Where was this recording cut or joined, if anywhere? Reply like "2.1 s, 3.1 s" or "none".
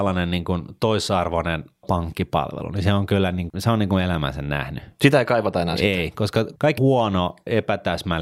3.5 s, 6.8 s